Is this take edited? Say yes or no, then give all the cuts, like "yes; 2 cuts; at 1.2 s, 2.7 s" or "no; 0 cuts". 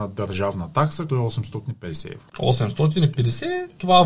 yes; 1 cut; at 1.1 s